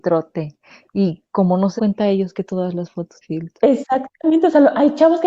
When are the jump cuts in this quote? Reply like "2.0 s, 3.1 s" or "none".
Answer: 1.8 s, 3.2 s

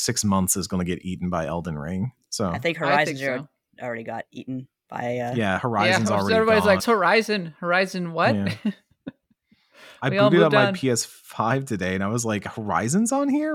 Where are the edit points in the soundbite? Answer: 6.8 s

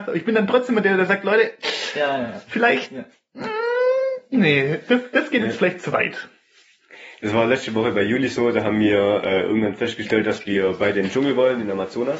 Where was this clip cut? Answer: none

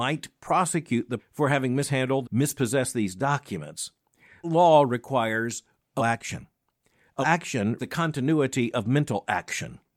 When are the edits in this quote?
1.2 s, 2.2 s, 4.4 s, 6.0 s, 7.2 s, 7.8 s

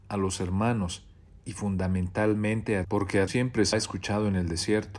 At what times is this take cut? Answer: 2.8 s, 3.3 s, 3.7 s

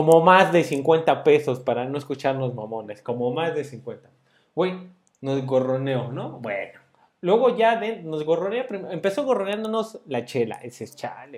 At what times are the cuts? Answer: none

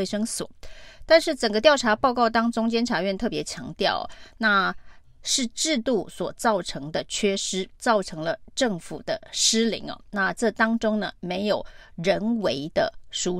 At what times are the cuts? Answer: 7.8 s

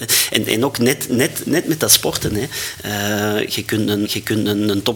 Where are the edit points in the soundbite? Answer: 4.0 s

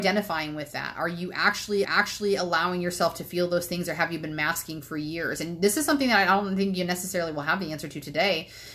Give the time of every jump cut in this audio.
1.8 s

